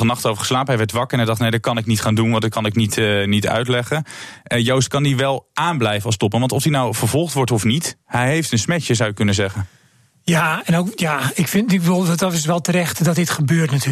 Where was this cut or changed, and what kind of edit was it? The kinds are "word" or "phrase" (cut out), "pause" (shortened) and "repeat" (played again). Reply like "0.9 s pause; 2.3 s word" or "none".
8.0 s pause

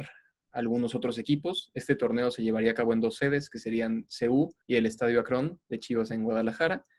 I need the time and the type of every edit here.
4.6 s pause

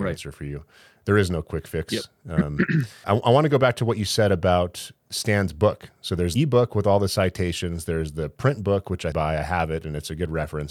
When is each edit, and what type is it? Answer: 3.0 s word; 5.0 s pause; 6.4 s word; 9.1 s phrase

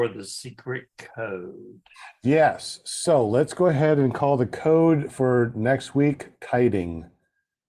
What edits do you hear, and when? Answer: none

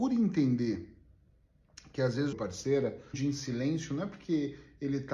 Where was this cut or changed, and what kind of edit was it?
2.3 s phrase; 3.1 s phrase

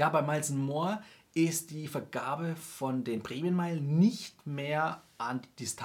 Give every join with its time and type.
none

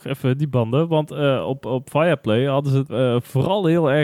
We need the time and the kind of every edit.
2.9 s word

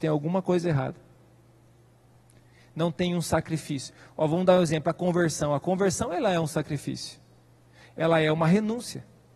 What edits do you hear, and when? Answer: none

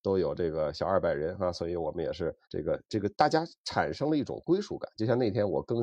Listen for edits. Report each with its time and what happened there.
2.4 s pause; 3.1 s pause

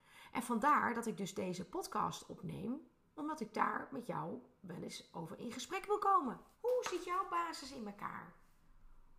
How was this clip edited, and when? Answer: 6.5 s pause

